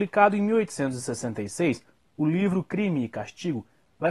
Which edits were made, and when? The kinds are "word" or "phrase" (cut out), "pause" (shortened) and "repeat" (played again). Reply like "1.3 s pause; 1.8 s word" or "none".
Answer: none

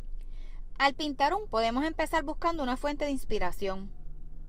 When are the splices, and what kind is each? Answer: 1.4 s word

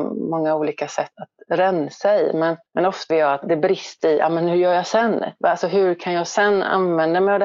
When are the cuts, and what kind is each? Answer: 1.1 s word; 2.7 s pause; 3.1 s word; 3.4 s word; 4.0 s word

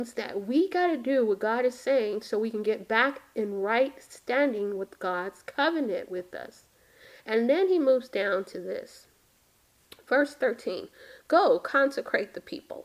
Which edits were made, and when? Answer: none

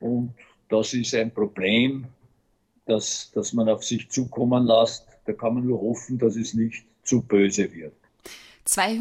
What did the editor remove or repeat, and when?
none

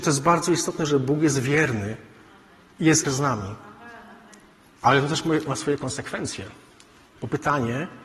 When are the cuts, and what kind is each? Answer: 3.0 s word

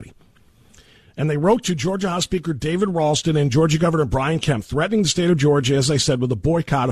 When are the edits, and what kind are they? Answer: none

